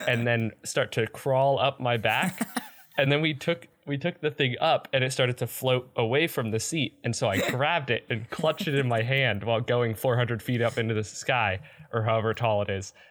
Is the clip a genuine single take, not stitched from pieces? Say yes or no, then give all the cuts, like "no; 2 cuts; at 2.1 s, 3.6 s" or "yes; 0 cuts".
yes; 0 cuts